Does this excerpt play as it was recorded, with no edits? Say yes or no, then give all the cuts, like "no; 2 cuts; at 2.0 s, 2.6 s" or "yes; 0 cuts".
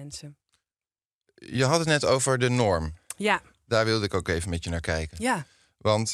yes; 0 cuts